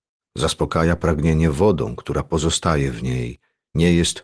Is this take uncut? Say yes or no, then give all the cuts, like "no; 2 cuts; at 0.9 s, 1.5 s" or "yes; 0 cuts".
yes; 0 cuts